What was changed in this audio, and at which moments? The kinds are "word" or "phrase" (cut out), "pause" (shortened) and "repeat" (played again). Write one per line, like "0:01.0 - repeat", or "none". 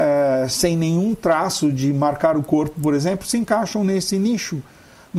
none